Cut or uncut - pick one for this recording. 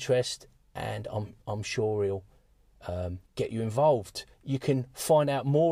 cut